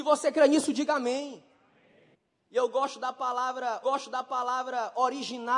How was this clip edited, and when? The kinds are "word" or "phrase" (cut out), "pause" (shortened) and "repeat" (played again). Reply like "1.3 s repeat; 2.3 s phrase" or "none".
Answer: 2.1 s pause; 3.8 s repeat